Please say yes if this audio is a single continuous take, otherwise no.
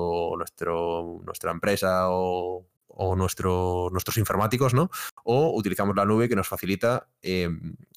no